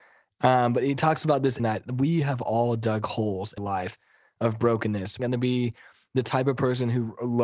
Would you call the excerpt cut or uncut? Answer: cut